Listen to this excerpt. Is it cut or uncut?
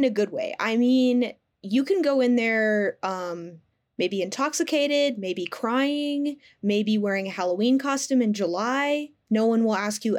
uncut